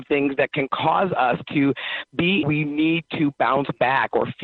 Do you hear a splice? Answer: yes; 1 cut; at 2.4 s

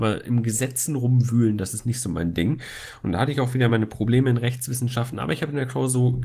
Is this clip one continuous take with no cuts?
yes; 0 cuts

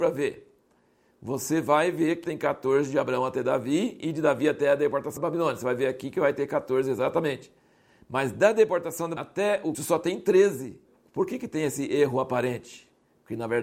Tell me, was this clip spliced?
yes; 4 cuts; at 2.2 s, 5.2 s, 9.2 s, 9.7 s

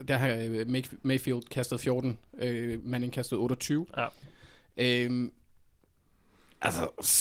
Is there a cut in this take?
no; 0 cuts

